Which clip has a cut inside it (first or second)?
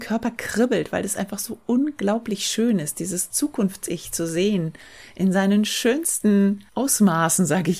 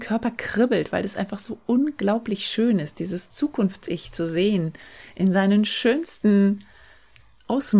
first